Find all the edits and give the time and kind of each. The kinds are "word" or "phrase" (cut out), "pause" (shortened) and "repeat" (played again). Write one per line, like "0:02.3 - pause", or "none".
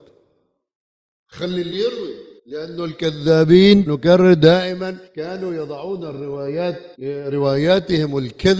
0:01.7 - word
0:02.4 - pause
0:03.9 - word
0:05.1 - pause
0:06.9 - pause